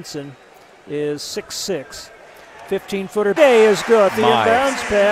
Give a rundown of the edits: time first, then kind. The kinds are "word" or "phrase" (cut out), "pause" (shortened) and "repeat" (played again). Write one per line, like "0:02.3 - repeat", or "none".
0:03.4 - phrase
0:04.1 - word